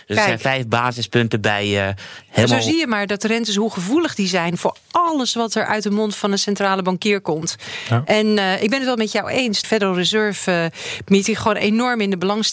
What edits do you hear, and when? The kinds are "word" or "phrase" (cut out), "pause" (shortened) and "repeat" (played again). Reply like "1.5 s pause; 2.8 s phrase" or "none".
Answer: 9.6 s phrase

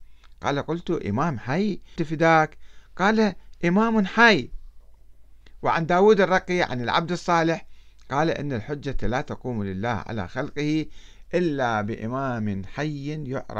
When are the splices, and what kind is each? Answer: 2.0 s word

